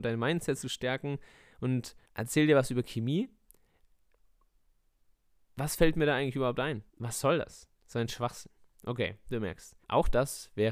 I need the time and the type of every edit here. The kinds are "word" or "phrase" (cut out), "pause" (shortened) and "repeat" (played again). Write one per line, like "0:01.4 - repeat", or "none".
0:02.0 - pause
0:06.9 - pause
0:07.8 - pause
0:09.8 - pause